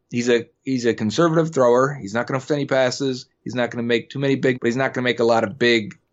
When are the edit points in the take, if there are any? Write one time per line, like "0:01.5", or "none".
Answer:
0:02.5
0:04.5